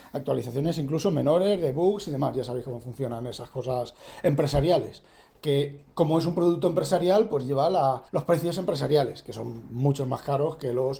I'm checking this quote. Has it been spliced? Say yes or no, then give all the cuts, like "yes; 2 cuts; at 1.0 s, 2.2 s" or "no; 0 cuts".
yes; 1 cut; at 8.1 s